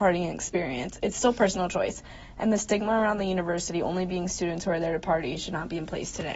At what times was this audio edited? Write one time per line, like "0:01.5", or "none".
none